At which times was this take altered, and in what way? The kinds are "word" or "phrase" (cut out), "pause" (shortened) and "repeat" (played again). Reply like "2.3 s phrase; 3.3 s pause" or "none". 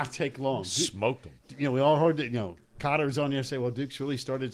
none